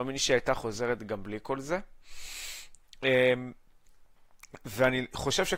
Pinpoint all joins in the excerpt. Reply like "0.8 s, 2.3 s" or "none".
none